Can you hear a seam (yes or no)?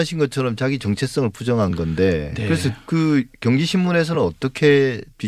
no